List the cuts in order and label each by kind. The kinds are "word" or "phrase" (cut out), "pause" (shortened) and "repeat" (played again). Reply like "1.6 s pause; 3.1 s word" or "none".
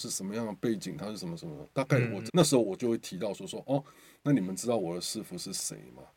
2.3 s word